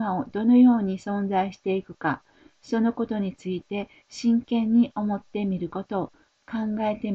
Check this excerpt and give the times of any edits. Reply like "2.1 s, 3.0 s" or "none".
none